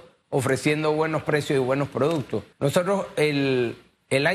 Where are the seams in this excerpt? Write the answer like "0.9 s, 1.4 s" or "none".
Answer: 2.5 s